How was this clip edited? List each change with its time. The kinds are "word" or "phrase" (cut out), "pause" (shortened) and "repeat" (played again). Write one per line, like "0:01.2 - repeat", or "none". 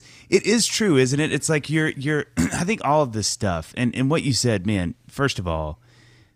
none